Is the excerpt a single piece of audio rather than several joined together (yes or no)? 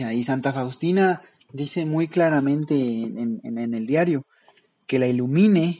yes